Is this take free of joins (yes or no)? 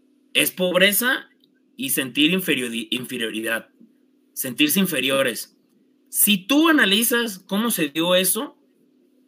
yes